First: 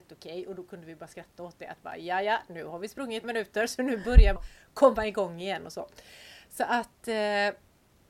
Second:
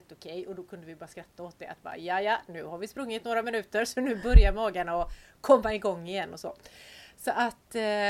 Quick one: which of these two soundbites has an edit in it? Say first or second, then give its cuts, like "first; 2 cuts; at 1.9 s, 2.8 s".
first; 2 cuts; at 3.2 s, 4.4 s